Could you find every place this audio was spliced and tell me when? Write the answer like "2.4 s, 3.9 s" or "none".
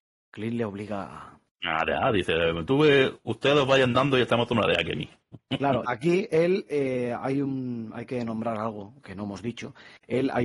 5.8 s